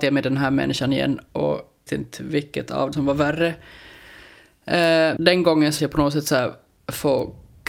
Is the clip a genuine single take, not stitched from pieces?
no; 4 cuts; at 1.9 s, 2.9 s, 5.2 s, 5.8 s

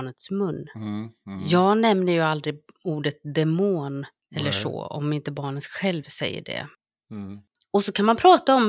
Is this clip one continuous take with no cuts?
yes; 0 cuts

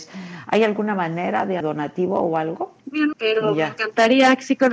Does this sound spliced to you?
yes; 3 cuts; at 1.6 s, 2.8 s, 3.1 s

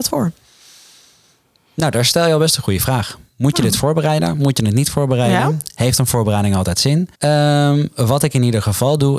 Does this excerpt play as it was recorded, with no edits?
no; 1 cut; at 7.1 s

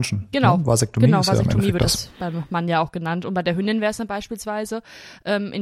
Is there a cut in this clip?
no; 0 cuts

